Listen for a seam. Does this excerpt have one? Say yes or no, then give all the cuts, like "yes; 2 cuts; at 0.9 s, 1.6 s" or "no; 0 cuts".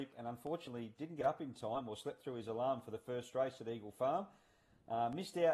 no; 0 cuts